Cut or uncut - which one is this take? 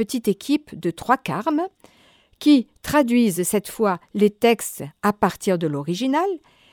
uncut